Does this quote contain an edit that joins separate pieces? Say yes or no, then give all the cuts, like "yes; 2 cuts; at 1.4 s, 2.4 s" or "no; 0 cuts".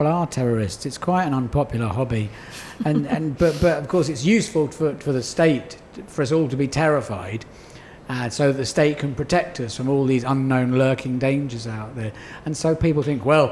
no; 0 cuts